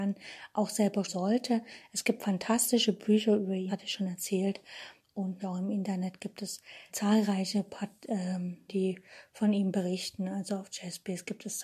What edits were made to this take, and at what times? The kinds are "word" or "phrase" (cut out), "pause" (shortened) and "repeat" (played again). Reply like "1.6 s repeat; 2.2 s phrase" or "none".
1.1 s word; 3.7 s word; 5.4 s word; 6.9 s word; 8.7 s word